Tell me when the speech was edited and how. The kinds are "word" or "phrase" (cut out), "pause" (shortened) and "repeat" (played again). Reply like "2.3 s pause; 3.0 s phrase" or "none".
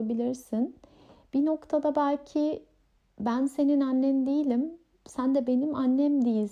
none